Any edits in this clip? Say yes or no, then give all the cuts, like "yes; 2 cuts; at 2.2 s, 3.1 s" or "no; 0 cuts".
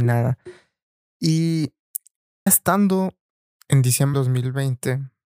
yes; 2 cuts; at 2.5 s, 4.1 s